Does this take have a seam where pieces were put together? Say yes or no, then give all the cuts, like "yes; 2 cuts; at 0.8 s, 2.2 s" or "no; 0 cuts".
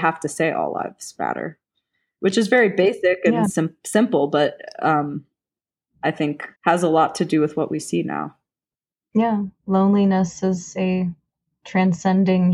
yes; 1 cut; at 6.5 s